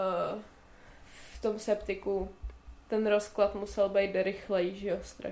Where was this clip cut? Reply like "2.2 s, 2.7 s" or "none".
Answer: 1.3 s, 2.8 s